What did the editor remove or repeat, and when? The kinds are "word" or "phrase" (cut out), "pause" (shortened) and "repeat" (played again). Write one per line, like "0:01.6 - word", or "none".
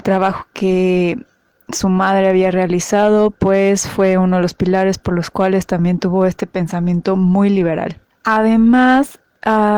none